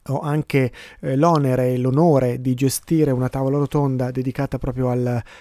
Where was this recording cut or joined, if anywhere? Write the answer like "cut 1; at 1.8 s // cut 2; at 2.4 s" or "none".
none